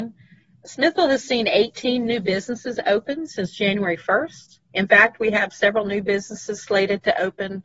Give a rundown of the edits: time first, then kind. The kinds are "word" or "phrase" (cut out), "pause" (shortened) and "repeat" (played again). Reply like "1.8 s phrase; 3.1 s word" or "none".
4.6 s pause

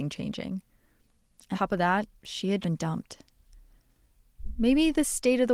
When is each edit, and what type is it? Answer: 1.5 s word; 2.2 s pause; 2.6 s word

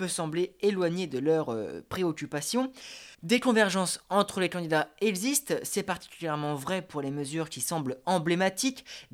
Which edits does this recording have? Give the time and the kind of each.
3.1 s pause

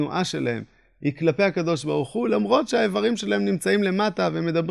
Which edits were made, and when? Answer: none

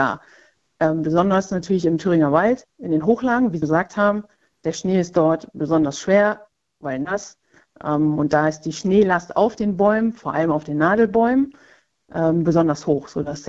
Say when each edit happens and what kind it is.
3.6 s word

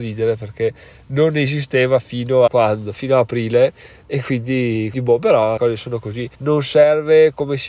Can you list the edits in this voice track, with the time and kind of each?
2.5 s word; 4.9 s word; 5.6 s phrase; 6.3 s pause

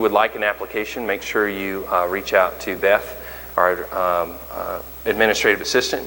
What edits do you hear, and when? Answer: none

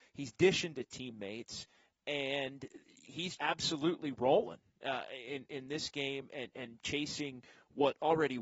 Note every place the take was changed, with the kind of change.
3.4 s word

